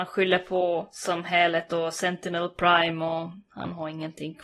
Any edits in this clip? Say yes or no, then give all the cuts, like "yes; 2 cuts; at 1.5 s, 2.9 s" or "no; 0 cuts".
no; 0 cuts